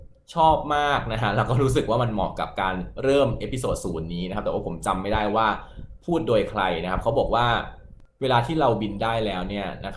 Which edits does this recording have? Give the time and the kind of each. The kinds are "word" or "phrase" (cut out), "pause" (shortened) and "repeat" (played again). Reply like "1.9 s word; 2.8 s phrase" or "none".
8.1 s pause